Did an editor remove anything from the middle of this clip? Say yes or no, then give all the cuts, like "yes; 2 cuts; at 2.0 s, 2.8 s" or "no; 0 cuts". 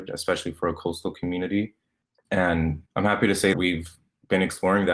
yes; 2 cuts; at 2.9 s, 3.5 s